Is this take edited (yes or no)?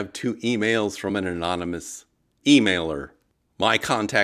no